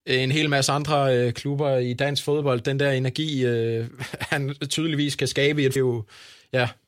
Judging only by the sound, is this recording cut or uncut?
cut